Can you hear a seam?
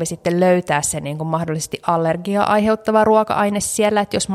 no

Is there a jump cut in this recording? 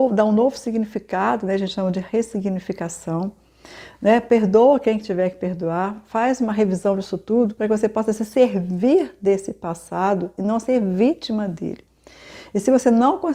no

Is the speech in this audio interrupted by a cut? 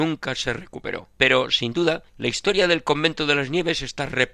yes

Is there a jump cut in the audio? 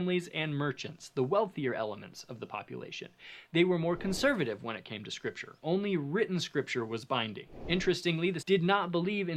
yes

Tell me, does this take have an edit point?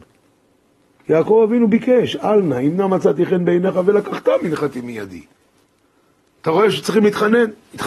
no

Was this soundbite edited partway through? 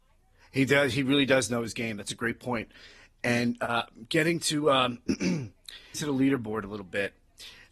yes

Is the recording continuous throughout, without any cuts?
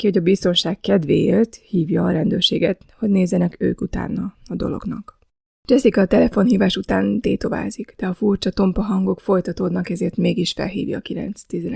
yes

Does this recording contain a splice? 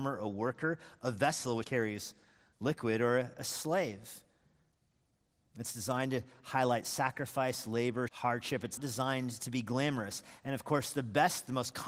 yes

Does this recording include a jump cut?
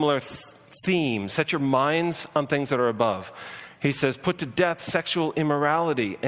no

